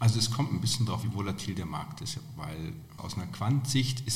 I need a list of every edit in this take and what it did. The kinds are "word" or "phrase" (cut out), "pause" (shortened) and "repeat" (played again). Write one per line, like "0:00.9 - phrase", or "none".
0:01.0 - word
0:03.0 - word

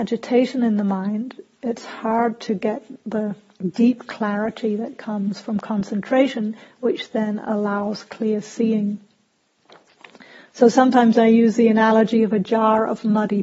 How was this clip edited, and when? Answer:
none

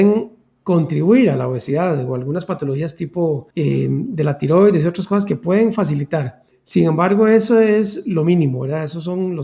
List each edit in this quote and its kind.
0:03.5 - pause
0:06.5 - pause

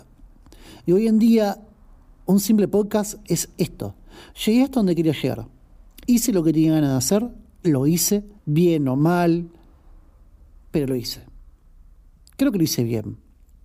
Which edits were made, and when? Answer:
0:08.4 - pause

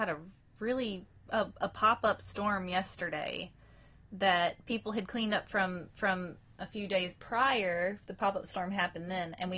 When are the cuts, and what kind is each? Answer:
0:01.1 - pause
0:05.9 - repeat

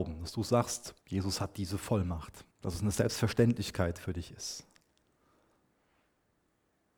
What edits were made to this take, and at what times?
0:01.0 - pause
0:02.5 - pause

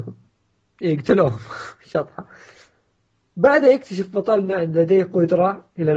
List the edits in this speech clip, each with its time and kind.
none

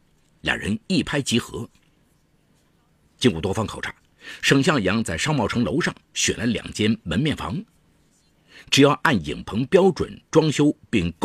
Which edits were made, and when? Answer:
none

